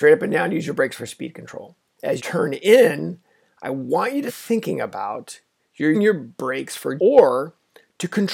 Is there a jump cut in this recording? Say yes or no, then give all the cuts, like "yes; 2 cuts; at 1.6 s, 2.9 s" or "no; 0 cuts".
yes; 4 cuts; at 2.2 s, 4.3 s, 5.9 s, 7.0 s